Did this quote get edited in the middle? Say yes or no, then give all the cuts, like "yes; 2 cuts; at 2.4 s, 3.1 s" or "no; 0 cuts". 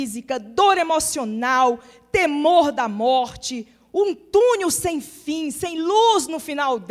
no; 0 cuts